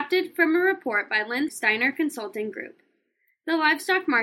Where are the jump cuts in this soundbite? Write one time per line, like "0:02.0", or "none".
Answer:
0:01.5